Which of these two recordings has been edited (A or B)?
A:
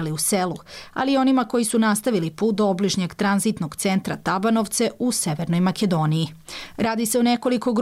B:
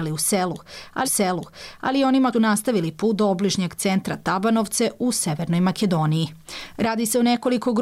B